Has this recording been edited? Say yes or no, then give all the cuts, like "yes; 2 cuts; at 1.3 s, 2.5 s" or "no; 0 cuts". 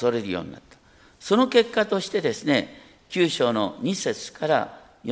no; 0 cuts